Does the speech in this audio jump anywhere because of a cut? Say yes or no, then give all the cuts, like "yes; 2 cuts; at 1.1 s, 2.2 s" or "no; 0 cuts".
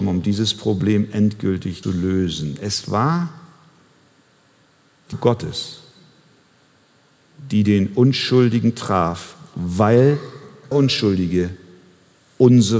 yes; 3 cuts; at 1.8 s, 5.1 s, 10.7 s